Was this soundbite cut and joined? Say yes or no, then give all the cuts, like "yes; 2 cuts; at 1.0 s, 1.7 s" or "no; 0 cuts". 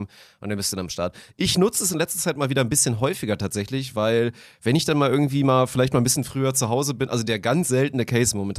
no; 0 cuts